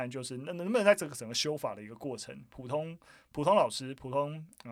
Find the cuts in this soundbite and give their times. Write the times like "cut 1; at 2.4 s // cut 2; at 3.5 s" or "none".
none